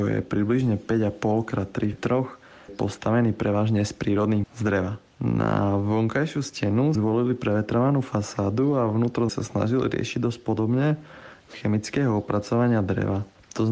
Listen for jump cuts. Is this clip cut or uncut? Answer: cut